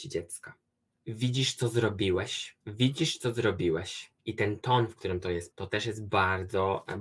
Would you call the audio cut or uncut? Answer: cut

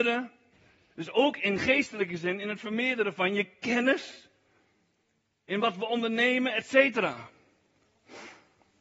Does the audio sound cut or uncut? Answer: uncut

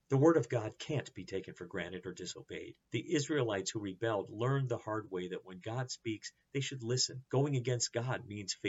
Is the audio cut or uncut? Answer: cut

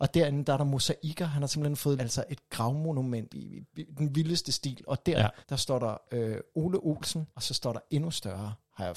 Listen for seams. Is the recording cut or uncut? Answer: cut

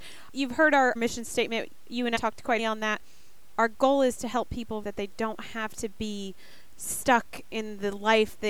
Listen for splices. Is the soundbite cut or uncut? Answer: cut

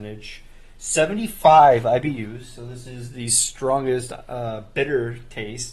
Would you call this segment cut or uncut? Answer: uncut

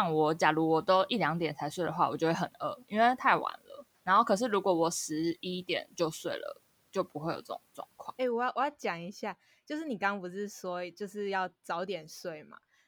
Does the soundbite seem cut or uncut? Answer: cut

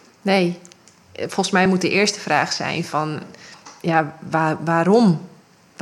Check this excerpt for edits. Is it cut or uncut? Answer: uncut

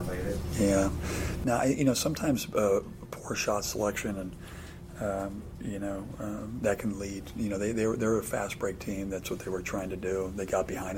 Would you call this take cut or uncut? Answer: uncut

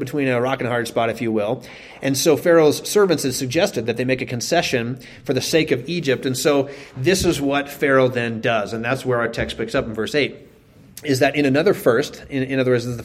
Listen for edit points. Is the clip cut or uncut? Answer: uncut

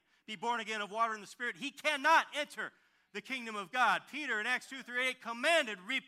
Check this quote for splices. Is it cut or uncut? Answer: uncut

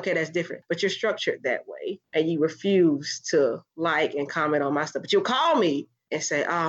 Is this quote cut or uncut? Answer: uncut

